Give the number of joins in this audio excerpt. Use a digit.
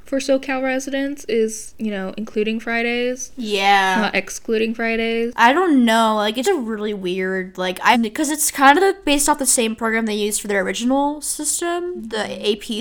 2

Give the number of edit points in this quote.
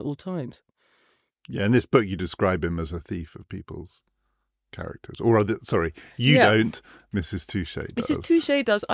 0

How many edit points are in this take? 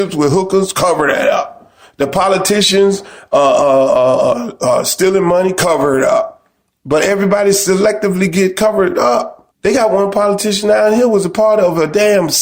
1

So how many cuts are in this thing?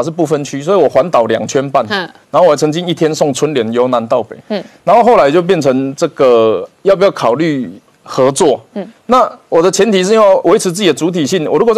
1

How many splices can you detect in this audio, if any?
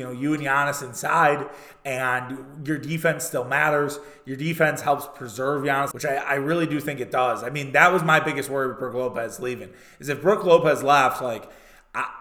1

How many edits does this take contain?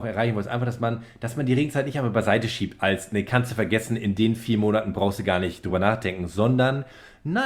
0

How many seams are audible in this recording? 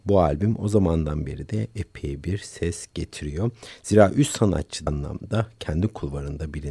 1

